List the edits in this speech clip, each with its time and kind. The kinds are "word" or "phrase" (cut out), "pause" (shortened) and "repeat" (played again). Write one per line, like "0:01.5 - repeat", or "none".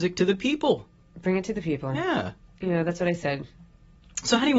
none